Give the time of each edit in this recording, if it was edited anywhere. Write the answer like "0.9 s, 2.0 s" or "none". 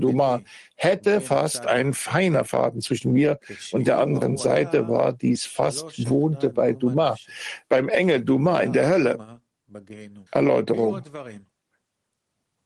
10.3 s